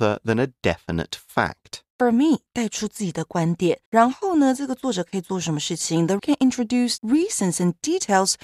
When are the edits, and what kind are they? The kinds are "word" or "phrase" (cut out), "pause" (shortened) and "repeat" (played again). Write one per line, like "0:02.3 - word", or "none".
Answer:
0:01.9 - pause
0:03.9 - pause
0:06.2 - word
0:07.0 - word